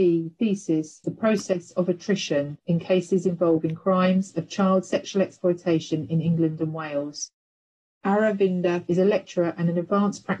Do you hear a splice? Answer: yes; 1 cut; at 1.0 s

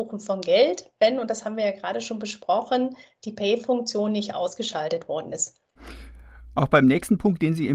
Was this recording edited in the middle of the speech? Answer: no; 0 cuts

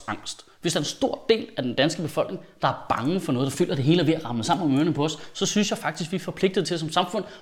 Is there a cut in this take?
no; 0 cuts

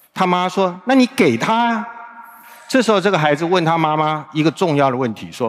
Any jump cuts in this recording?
no; 0 cuts

